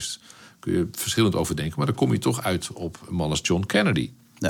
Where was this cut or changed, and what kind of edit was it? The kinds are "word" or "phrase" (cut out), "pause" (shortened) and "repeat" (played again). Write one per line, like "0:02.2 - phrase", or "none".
none